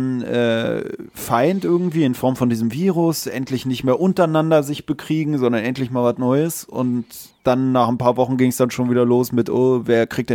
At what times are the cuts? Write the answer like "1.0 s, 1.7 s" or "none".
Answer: 7.3 s